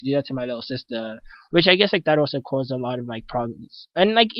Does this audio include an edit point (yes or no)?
no